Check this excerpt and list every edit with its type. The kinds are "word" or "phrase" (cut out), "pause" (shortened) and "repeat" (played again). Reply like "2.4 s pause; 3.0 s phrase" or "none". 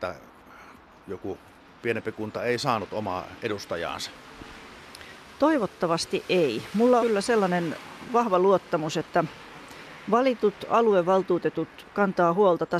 7.0 s word